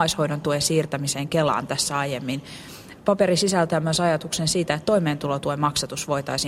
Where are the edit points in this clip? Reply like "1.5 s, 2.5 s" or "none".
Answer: none